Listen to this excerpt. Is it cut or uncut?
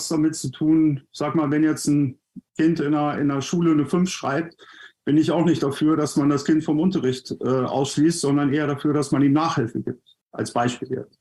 cut